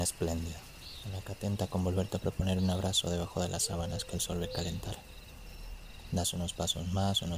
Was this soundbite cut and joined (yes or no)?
no